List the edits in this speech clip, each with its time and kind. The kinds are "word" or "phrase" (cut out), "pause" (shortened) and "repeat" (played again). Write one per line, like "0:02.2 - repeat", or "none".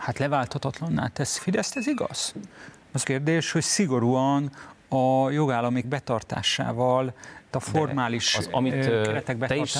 0:01.4 - word
0:03.0 - word
0:05.8 - word
0:07.5 - word